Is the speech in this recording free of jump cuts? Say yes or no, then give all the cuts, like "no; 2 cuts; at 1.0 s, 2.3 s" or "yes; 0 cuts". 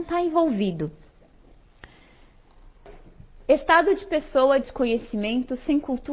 no; 1 cut; at 4.6 s